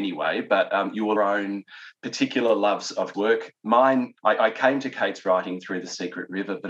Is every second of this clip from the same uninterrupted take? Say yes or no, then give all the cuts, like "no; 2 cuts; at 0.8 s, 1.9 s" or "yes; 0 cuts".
no; 3 cuts; at 1.2 s, 3.1 s, 4.2 s